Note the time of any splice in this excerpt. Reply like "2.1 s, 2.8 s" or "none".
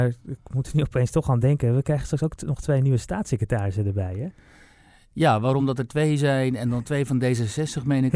none